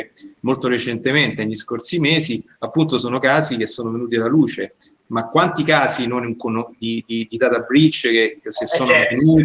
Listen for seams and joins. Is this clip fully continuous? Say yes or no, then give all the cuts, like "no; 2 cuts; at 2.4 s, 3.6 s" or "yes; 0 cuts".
yes; 0 cuts